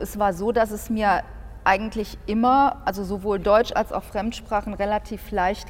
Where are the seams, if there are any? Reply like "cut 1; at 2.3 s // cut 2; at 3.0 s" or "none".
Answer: none